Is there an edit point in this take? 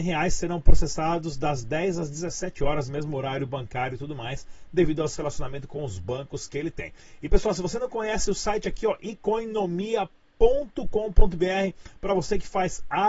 no; 0 cuts

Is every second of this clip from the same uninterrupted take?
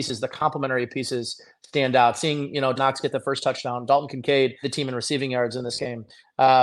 no; 2 cuts; at 2.8 s, 4.6 s

